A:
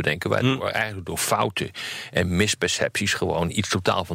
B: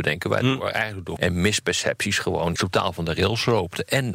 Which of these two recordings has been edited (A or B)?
B